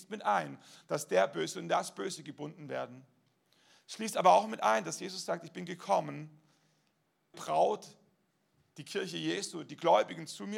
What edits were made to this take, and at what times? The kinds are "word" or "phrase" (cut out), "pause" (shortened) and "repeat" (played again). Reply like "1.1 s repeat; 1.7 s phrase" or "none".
7.3 s word